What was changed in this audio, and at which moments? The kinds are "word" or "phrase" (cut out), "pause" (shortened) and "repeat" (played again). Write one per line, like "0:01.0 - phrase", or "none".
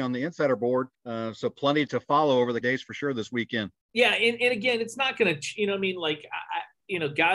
0:00.9 - pause
0:01.9 - word
0:02.6 - word
0:03.8 - pause